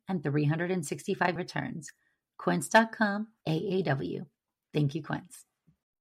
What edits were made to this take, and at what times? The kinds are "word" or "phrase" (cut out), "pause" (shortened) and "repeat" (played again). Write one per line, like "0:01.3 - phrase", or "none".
0:01.4 - word
0:03.4 - word